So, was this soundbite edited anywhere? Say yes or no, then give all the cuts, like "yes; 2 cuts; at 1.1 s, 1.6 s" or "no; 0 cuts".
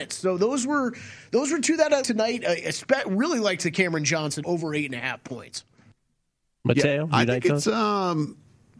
yes; 2 cuts; at 2.0 s, 4.4 s